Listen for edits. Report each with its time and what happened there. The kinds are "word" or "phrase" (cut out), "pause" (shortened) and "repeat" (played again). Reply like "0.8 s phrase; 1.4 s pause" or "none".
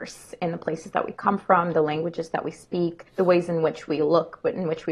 3.1 s pause